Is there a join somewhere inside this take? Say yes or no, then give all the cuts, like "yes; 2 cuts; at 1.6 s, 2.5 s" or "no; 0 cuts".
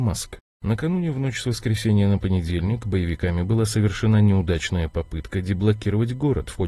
no; 0 cuts